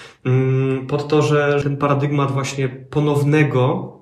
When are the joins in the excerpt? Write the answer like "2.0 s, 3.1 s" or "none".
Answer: 1.6 s